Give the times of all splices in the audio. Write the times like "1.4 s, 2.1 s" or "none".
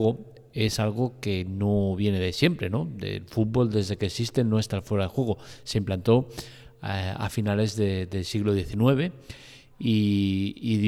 none